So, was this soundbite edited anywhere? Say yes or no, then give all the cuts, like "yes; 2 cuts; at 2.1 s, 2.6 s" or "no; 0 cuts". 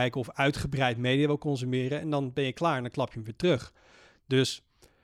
no; 0 cuts